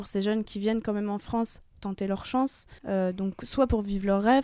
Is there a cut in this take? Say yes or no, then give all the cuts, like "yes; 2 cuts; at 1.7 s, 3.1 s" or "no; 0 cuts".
yes; 1 cut; at 2.8 s